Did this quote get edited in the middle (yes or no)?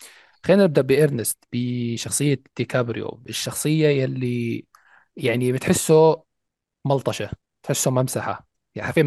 no